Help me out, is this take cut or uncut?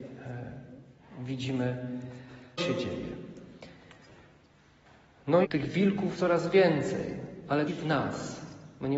cut